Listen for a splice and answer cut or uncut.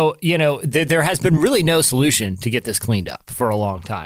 uncut